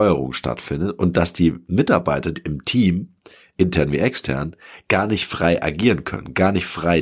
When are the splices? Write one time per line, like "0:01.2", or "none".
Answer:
none